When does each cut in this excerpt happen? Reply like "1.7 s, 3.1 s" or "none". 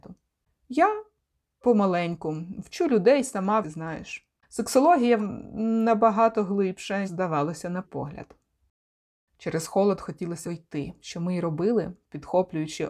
1.6 s, 3.6 s, 5.2 s, 7.0 s, 7.8 s, 10.4 s